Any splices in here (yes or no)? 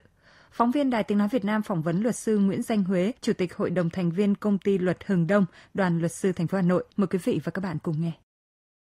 yes